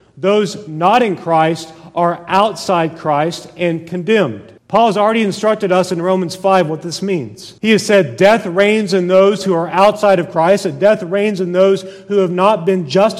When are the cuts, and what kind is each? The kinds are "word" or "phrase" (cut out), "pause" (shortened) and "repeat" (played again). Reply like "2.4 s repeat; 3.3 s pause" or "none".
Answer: 4.6 s pause; 7.6 s pause